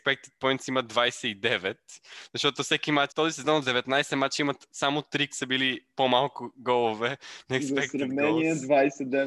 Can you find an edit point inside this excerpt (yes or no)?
yes